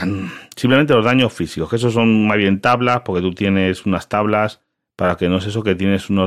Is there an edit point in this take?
no; 0 cuts

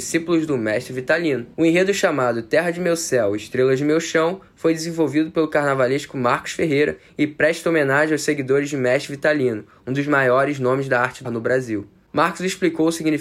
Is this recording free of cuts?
no; 2 cuts; at 1.5 s, 11.2 s

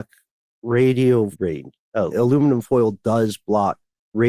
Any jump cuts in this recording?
yes; 2 cuts; at 1.3 s, 2.1 s

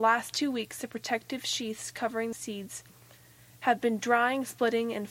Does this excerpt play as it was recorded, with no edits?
no; 1 cut; at 2.3 s

